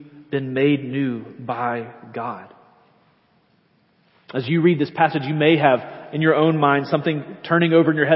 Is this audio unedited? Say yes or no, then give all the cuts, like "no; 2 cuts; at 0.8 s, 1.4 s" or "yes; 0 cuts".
yes; 0 cuts